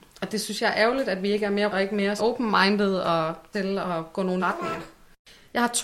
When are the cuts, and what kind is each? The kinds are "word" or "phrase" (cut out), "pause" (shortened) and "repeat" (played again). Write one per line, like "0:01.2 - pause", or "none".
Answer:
0:01.7 - word
0:02.2 - word
0:03.5 - word
0:04.4 - word